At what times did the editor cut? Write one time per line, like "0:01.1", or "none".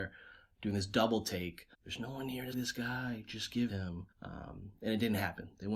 0:01.7
0:02.5
0:03.7
0:04.1